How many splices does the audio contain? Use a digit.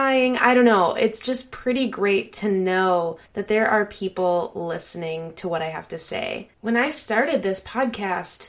2